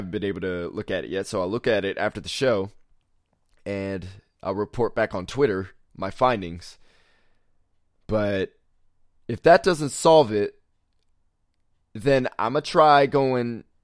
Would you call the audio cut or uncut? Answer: uncut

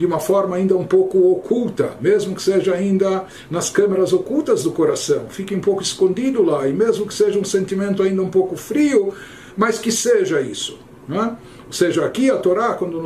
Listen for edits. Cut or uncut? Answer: uncut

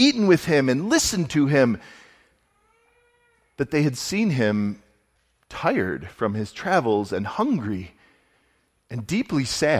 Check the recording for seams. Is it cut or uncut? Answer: uncut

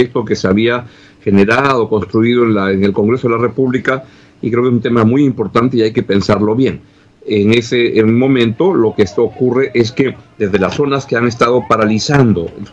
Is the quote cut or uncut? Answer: uncut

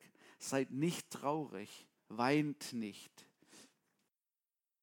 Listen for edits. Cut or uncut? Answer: uncut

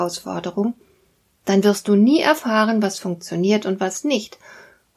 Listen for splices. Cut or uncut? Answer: uncut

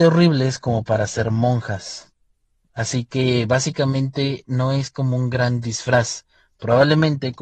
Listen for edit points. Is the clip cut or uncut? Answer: uncut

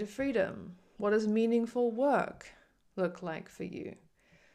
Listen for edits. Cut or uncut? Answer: uncut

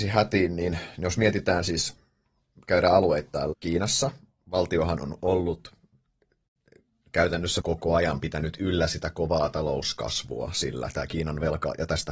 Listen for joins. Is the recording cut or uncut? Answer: cut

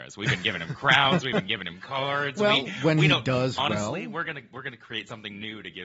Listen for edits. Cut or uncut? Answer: uncut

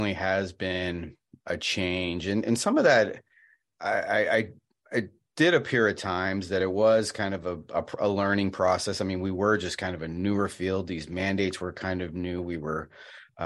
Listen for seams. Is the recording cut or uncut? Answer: uncut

